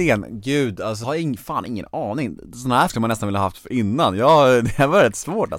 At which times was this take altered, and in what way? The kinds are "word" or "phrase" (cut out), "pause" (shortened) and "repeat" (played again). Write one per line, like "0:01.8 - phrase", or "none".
0:01.0 - word
0:02.9 - word